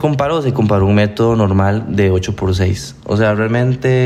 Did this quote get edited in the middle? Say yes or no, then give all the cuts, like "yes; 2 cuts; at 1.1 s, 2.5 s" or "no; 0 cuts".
no; 0 cuts